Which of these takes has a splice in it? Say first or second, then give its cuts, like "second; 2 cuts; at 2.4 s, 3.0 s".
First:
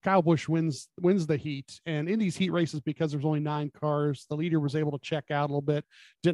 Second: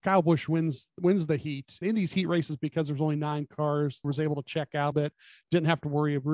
second; 3 cuts; at 1.8 s, 4.0 s, 4.9 s